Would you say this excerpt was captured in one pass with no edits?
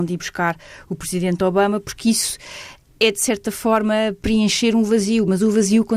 yes; 0 cuts

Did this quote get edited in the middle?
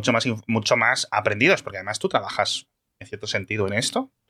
no; 0 cuts

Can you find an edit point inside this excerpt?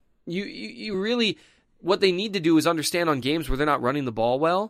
no; 0 cuts

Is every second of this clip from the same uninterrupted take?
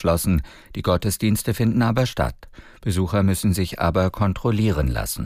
yes; 0 cuts

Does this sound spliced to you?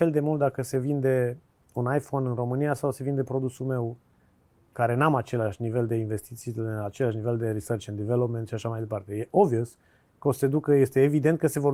no; 0 cuts

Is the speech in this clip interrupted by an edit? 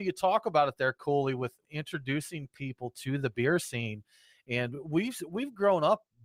no; 0 cuts

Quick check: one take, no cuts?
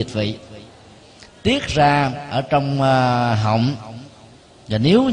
yes; 0 cuts

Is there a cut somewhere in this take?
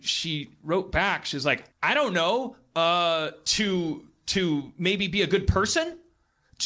yes; 1 cut; at 1.7 s

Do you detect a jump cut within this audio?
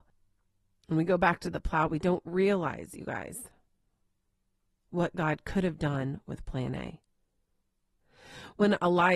no; 0 cuts

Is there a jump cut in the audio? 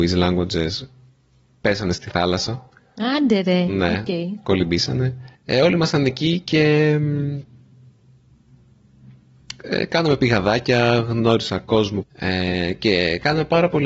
yes; 3 cuts; at 2.8 s, 5.4 s, 12.0 s

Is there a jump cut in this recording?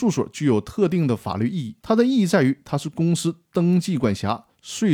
yes; 1 cut; at 1.8 s

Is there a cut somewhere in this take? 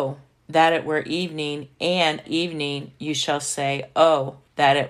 yes; 1 cut; at 2.2 s

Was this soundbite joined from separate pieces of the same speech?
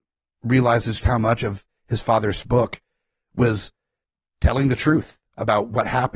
yes; 2 cuts; at 1.0 s, 2.4 s

